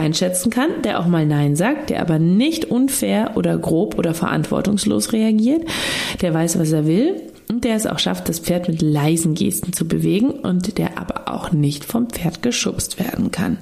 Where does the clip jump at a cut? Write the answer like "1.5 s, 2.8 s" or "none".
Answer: none

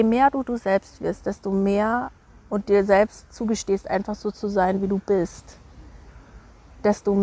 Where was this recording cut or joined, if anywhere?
none

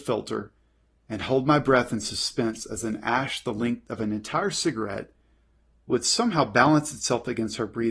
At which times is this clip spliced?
none

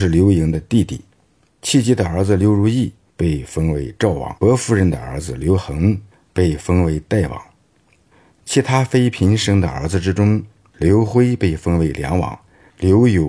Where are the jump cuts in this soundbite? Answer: 4.4 s

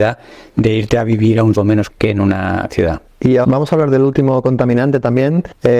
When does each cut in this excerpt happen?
1.5 s, 1.9 s, 2.7 s, 3.4 s

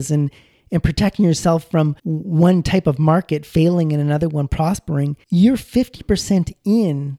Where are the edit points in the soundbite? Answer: 2.0 s, 5.2 s

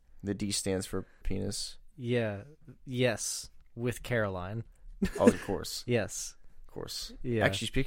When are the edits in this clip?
1.2 s, 3.6 s, 5.3 s

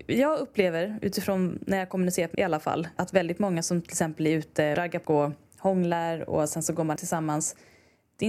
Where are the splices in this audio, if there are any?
2.3 s, 3.0 s, 4.7 s, 5.0 s, 7.0 s

